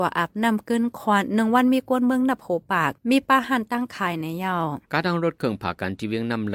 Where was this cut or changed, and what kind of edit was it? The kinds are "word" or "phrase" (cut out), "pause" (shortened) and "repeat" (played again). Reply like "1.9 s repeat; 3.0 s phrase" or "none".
4.8 s pause

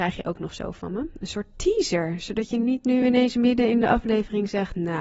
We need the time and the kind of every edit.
none

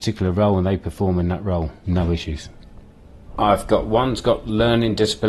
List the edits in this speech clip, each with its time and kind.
none

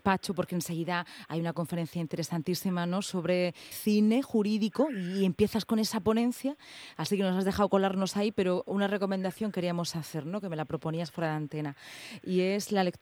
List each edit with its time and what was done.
3.7 s word

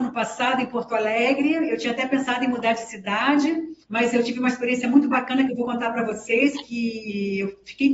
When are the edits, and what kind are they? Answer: 3.8 s pause

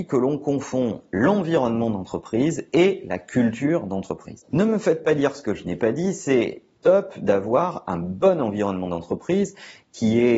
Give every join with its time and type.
none

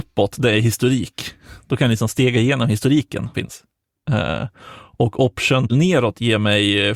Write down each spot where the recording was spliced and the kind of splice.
3.3 s word; 5.7 s word

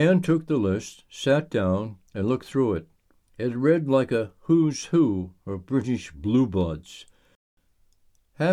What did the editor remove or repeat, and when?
2.1 s pause; 3.2 s pause

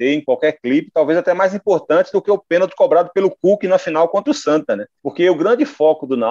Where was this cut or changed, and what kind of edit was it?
5.0 s pause

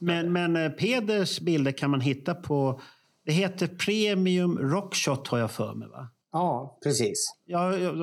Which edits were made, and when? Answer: none

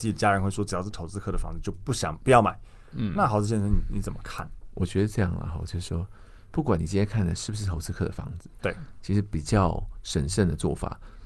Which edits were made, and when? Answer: none

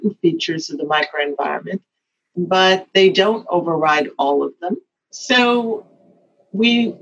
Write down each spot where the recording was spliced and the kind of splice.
none

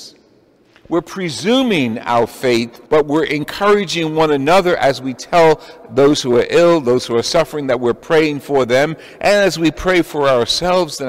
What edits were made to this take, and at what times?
2.9 s pause

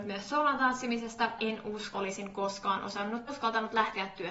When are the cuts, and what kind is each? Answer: 1.4 s word; 1.9 s word; 3.3 s word

